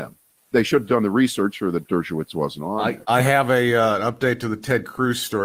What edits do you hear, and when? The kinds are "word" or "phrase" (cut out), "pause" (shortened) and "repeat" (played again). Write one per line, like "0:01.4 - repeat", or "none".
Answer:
0:01.5 - phrase
0:03.0 - pause